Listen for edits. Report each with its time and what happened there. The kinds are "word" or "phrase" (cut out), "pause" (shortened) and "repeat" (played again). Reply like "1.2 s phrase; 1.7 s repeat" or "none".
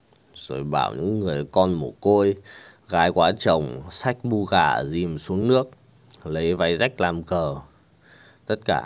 none